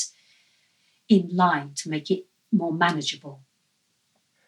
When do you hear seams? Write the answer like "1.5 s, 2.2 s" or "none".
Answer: none